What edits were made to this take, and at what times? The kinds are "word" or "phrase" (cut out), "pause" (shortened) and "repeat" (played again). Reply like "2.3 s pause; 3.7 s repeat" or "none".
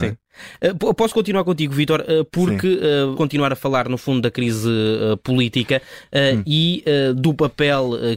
3.1 s word